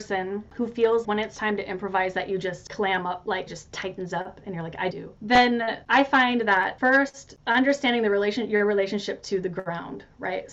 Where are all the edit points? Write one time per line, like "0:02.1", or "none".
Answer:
0:01.0
0:03.5
0:04.9